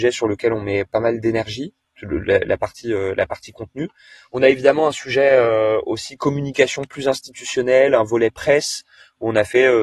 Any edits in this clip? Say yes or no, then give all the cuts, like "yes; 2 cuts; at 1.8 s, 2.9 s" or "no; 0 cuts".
no; 0 cuts